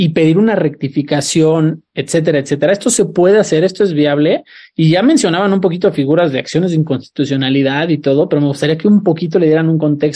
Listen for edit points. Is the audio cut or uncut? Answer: uncut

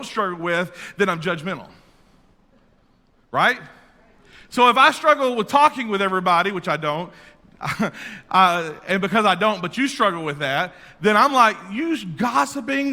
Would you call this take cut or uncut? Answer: uncut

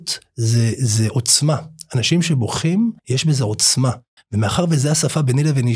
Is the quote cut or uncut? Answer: cut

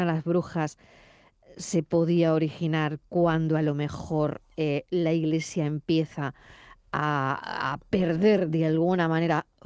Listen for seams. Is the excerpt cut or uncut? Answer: uncut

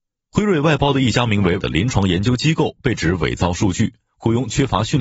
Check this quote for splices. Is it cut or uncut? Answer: cut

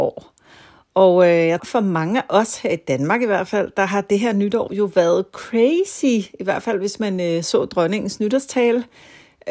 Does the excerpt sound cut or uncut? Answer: cut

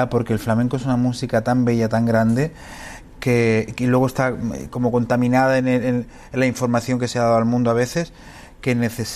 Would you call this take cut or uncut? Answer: cut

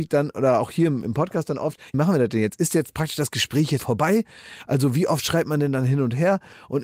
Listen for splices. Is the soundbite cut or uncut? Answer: cut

